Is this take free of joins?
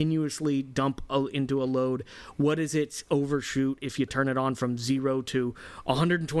yes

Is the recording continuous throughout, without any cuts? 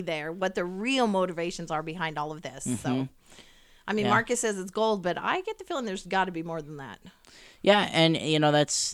yes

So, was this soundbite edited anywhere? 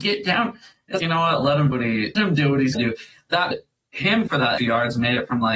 yes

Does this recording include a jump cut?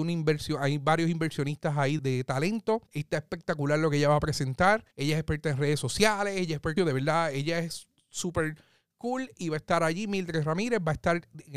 yes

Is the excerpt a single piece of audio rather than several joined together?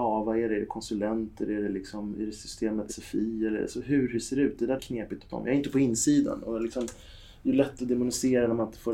no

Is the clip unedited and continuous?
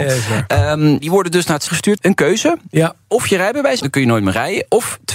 no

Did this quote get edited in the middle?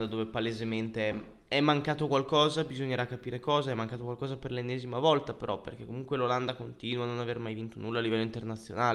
no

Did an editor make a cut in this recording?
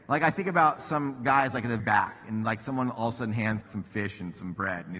yes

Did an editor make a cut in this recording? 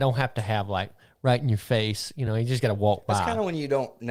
no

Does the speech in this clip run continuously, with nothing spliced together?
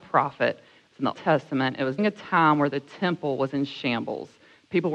no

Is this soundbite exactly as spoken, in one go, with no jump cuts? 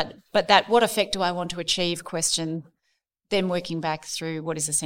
yes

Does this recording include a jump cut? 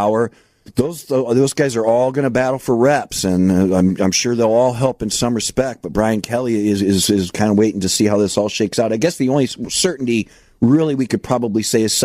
no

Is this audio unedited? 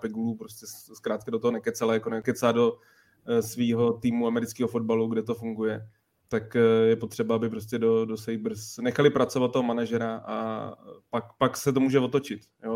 yes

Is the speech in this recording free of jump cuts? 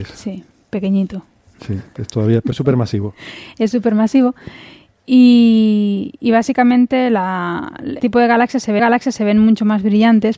no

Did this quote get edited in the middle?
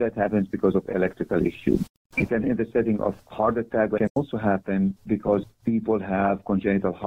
yes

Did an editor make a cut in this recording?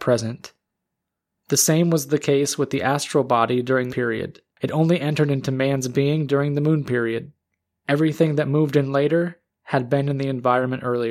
yes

